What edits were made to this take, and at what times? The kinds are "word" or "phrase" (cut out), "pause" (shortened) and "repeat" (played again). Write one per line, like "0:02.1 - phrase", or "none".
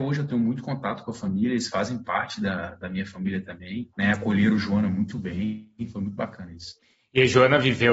0:03.9 - pause